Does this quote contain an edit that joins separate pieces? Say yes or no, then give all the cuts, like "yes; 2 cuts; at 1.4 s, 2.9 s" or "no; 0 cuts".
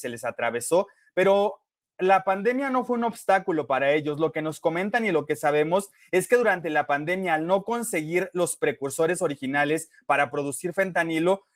no; 0 cuts